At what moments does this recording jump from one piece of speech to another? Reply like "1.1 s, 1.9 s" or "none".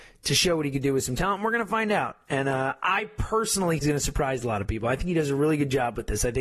3.8 s